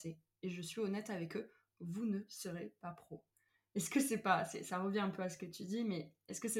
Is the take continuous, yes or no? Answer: yes